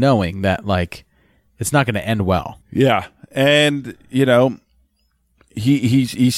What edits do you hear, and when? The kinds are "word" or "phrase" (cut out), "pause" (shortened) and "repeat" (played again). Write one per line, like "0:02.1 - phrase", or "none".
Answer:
none